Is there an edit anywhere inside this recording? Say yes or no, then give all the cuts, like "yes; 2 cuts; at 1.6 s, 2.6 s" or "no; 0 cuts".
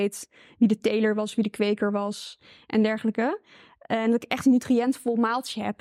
no; 0 cuts